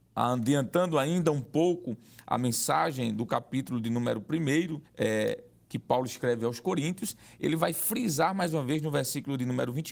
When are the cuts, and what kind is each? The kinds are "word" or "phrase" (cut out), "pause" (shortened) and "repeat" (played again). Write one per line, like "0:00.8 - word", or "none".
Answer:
0:04.9 - pause